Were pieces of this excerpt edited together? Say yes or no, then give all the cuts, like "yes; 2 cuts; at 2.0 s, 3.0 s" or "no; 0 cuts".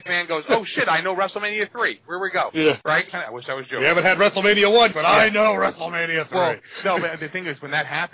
yes; 2 cuts; at 3.1 s, 4.9 s